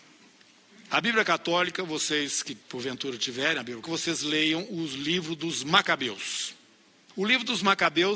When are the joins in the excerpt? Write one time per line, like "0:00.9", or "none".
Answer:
0:02.6
0:03.8